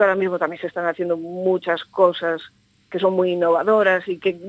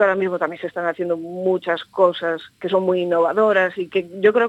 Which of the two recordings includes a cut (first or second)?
second